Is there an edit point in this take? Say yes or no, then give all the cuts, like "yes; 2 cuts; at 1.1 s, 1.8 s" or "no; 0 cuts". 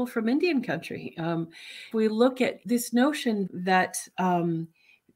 yes; 3 cuts; at 1.9 s, 2.6 s, 3.5 s